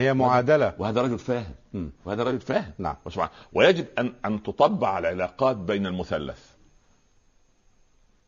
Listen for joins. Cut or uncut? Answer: uncut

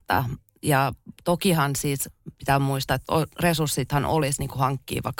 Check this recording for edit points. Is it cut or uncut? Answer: uncut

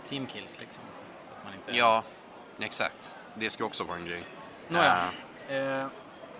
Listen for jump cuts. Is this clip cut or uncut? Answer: uncut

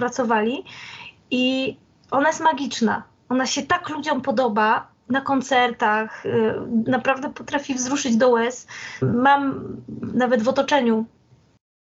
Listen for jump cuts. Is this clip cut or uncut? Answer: uncut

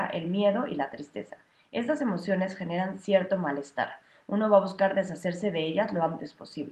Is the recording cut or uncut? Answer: uncut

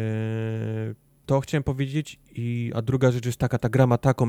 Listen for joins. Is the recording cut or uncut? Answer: uncut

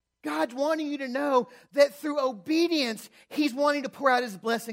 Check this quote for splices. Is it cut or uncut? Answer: uncut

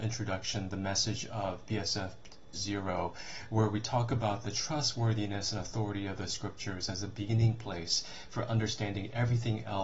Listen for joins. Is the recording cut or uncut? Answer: cut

